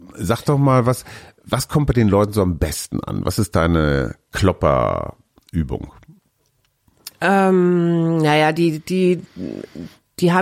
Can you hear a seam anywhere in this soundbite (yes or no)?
no